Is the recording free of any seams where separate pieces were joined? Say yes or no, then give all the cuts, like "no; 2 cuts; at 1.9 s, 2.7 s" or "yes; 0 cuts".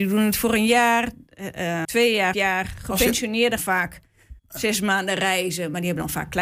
no; 4 cuts; at 1.8 s, 2.3 s, 3.6 s, 4.4 s